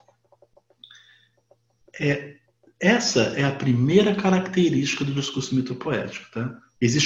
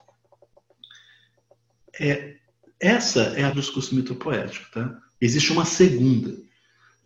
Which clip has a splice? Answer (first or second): second